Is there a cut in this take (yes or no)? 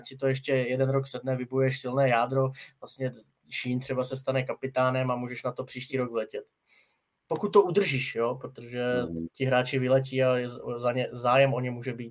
no